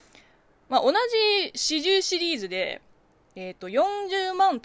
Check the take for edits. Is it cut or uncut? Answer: uncut